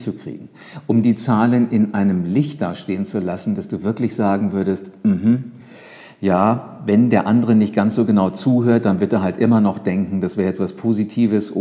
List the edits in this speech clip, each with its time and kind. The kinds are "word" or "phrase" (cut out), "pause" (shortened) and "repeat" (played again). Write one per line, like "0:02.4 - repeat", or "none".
none